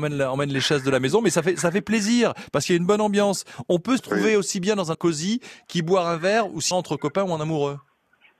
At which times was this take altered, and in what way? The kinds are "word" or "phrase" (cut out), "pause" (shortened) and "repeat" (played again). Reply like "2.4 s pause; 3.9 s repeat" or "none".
4.0 s word; 4.9 s word; 6.7 s word